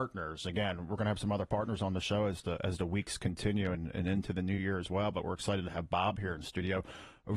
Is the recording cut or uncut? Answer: uncut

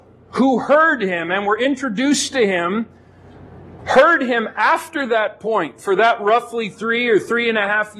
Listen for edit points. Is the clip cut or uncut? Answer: uncut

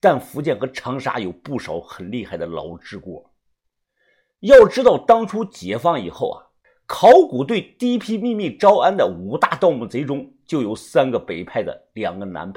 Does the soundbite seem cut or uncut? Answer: cut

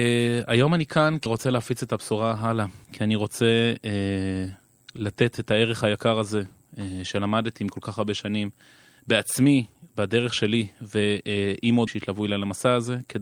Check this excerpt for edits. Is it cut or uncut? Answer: cut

